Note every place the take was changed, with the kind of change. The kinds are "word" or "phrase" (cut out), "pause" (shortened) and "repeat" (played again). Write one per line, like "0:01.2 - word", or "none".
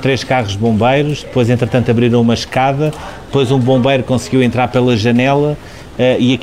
none